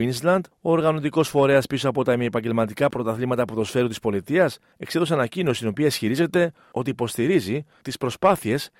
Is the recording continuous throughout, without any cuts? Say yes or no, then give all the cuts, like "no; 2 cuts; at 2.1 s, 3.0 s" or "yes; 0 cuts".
yes; 0 cuts